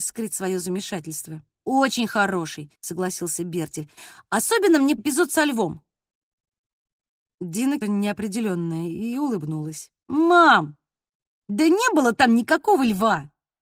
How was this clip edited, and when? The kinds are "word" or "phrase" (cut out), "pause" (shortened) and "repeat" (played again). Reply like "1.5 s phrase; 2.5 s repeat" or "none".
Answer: 1.5 s pause; 2.7 s pause; 5.0 s word; 7.8 s phrase; 10.0 s pause